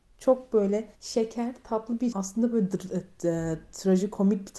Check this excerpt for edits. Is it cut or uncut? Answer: cut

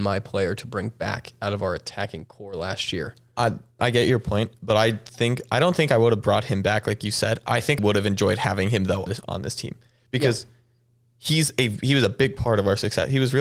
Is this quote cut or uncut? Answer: cut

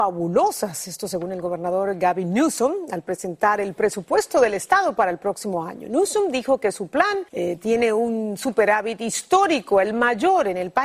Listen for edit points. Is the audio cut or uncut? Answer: cut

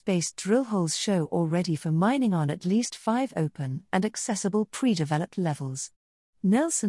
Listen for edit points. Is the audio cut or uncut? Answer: uncut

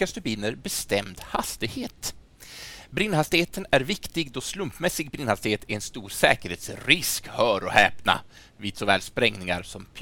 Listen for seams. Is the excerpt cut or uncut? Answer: uncut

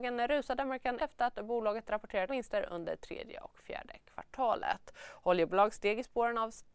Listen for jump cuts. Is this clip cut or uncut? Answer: cut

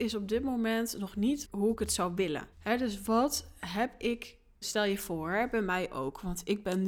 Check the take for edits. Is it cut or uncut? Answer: cut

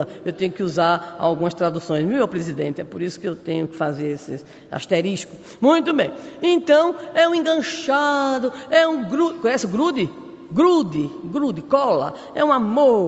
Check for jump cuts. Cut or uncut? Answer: uncut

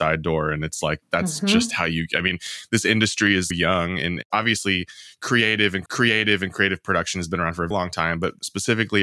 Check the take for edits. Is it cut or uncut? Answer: cut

